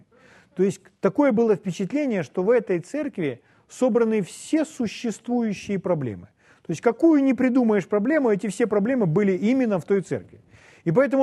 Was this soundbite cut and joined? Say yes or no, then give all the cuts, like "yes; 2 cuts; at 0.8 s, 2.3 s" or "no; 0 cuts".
no; 0 cuts